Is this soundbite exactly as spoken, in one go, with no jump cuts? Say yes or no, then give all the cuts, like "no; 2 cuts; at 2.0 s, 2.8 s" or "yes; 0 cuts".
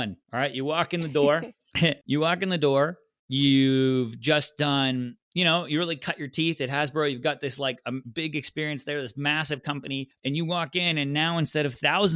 yes; 0 cuts